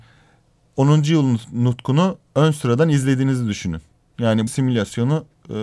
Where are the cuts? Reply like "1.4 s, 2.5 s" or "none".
2.2 s, 4.5 s